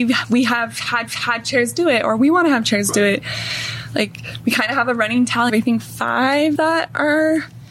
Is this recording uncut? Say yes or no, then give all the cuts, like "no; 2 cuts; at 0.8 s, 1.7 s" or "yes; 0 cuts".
no; 3 cuts; at 1.1 s, 5.5 s, 6.6 s